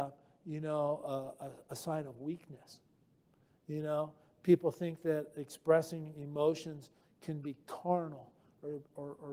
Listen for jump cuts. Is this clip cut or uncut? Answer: uncut